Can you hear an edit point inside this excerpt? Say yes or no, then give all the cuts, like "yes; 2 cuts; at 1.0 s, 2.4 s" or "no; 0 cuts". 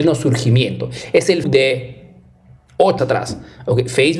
yes; 2 cuts; at 1.4 s, 3.0 s